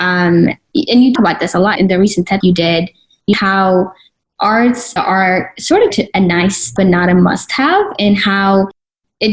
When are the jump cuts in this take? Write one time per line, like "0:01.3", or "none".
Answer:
0:01.2
0:01.8
0:02.4
0:03.3
0:05.0
0:05.9
0:06.8